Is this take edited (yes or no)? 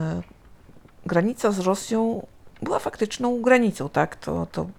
yes